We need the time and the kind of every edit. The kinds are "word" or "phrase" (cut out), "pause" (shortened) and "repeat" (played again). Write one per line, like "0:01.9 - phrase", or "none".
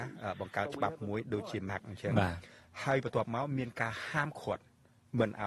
0:01.7 - word